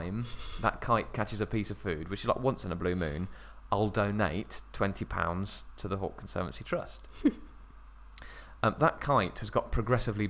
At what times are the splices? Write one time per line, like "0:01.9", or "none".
none